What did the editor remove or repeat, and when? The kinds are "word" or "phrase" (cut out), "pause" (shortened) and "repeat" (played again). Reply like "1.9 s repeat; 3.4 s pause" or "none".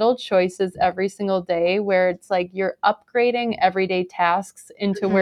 none